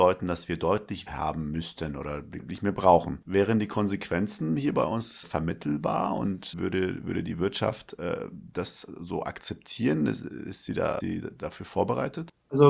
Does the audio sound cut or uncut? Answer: cut